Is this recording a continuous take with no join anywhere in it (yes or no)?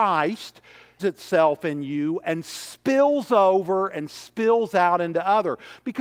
no